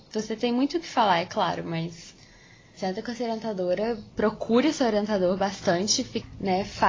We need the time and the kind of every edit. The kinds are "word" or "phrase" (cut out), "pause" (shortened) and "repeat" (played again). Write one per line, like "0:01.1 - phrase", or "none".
0:02.8 - word
0:04.1 - pause

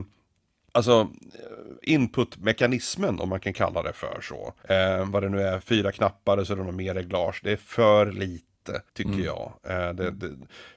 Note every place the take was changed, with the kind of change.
0:01.8 - pause
0:04.6 - pause
0:08.9 - pause

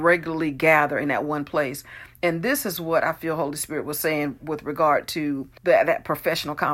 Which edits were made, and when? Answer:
0:05.6 - pause

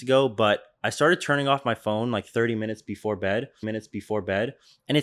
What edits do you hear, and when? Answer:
0:03.6 - repeat

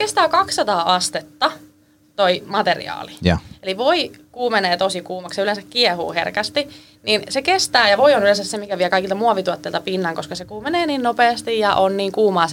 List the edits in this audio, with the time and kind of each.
none

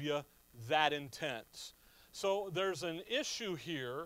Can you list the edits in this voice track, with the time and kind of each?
none

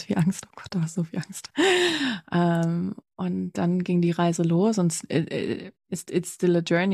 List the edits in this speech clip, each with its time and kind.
none

